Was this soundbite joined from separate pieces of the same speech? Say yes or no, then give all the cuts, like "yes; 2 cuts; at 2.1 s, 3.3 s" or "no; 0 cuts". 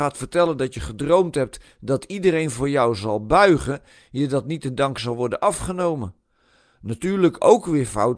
no; 0 cuts